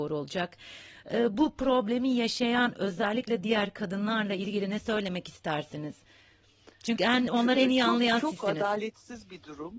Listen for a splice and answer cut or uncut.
uncut